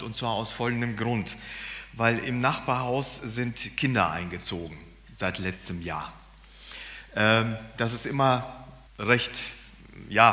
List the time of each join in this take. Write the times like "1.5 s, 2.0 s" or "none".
8.9 s